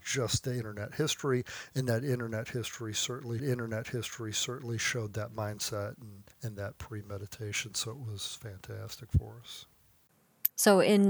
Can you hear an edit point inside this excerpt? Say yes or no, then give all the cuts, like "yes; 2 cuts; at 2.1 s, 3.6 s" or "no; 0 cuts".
yes; 2 cuts; at 3.4 s, 6.3 s